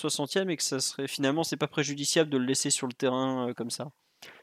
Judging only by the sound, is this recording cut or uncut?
uncut